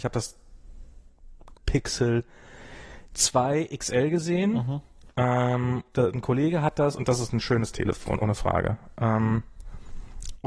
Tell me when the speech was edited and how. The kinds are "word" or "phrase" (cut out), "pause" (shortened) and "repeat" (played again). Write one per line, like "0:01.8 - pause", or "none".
0:01.5 - word
0:05.9 - word
0:08.2 - word

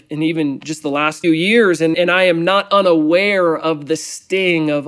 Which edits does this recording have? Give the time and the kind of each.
0:01.2 - word
0:01.9 - word

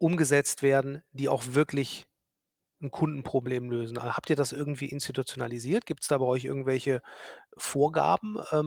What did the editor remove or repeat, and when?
none

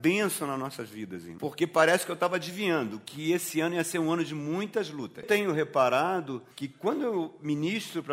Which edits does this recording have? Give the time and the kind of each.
0:06.5 - pause

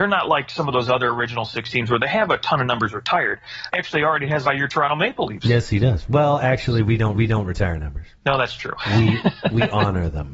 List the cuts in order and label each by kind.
0:03.7 - phrase
0:04.4 - phrase
0:07.1 - repeat
0:08.2 - pause

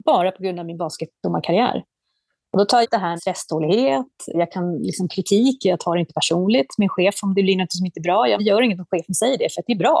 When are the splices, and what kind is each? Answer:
0:02.8 - word
0:03.2 - word
0:04.3 - word
0:08.4 - word

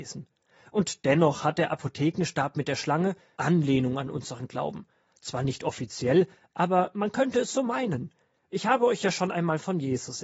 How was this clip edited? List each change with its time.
0:03.4 - word

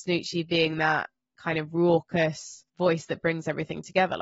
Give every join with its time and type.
0:02.7 - pause

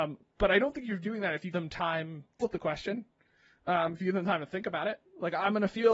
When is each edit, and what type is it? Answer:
0:01.5 - word
0:02.4 - word

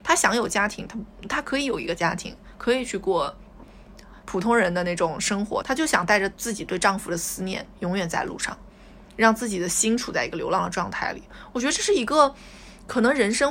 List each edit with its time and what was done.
0:05.6 - phrase

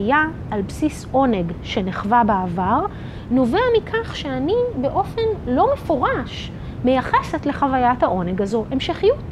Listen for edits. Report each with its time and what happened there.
none

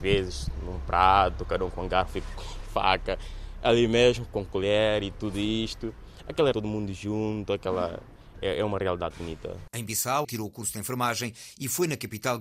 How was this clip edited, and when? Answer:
0:06.5 - word
0:09.1 - word
0:10.2 - word

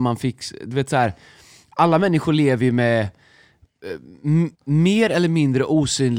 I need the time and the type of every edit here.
0:04.5 - pause

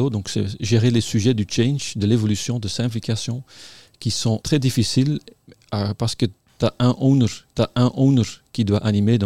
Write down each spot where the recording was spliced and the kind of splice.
0:04.4 - word
0:07.6 - repeat

